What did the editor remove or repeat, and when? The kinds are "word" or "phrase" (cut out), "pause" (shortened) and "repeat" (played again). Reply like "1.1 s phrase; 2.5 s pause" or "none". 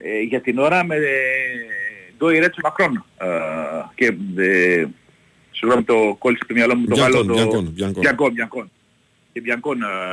2.6 s word